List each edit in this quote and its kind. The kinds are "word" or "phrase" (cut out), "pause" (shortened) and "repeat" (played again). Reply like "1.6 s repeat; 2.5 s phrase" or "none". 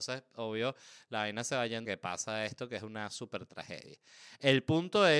1.8 s phrase